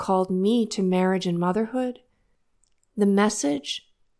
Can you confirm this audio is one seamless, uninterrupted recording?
yes; 0 cuts

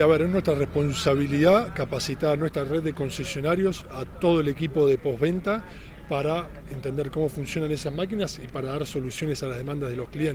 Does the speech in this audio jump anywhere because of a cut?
no; 0 cuts

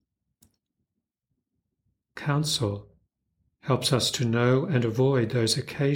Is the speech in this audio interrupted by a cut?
no; 0 cuts

